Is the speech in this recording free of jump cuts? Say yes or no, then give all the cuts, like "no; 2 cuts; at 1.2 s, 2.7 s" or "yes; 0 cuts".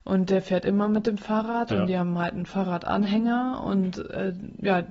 yes; 0 cuts